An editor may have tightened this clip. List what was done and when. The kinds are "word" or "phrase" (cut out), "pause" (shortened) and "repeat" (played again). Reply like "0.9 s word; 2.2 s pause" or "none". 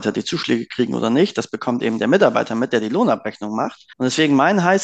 3.9 s pause